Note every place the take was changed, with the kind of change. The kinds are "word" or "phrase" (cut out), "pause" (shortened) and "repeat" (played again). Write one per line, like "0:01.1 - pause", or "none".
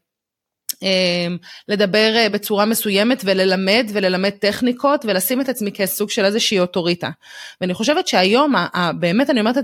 none